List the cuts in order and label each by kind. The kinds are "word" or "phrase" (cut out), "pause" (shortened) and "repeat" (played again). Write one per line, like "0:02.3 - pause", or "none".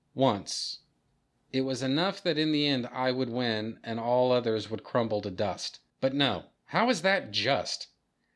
0:05.9 - pause